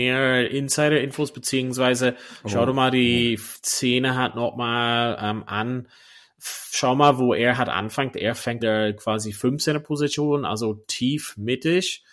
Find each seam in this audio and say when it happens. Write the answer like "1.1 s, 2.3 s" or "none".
8.6 s